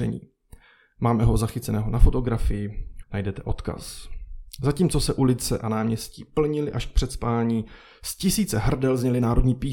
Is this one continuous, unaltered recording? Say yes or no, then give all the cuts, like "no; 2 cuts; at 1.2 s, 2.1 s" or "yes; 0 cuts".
no; 1 cut; at 3.0 s